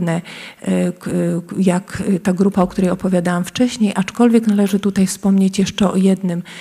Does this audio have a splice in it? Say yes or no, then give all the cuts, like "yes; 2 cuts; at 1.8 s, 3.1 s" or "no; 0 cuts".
no; 0 cuts